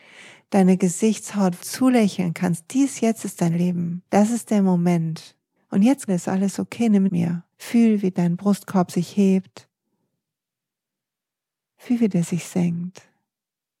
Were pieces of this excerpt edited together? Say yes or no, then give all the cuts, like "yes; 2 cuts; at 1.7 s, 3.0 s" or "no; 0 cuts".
yes; 6 cuts; at 1.6 s, 4.1 s, 5.6 s, 6.1 s, 7.1 s, 7.5 s